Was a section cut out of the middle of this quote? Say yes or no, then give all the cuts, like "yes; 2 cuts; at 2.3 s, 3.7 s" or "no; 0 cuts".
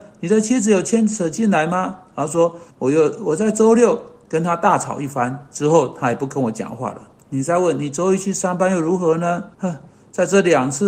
yes; 2 cuts; at 2.7 s, 9.5 s